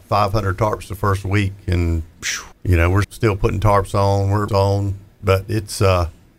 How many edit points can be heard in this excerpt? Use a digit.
3